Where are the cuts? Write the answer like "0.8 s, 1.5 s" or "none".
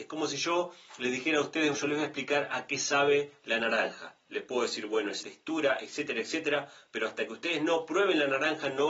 1.7 s, 5.2 s